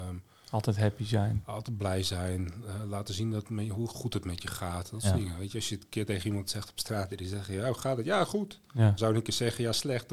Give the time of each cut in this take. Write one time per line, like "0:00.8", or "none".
0:09.0